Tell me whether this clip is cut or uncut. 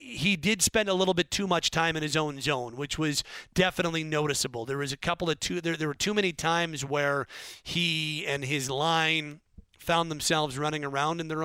uncut